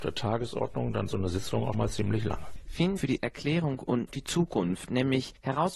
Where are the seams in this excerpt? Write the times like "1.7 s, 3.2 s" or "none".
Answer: 1.1 s, 1.7 s, 3.0 s, 4.1 s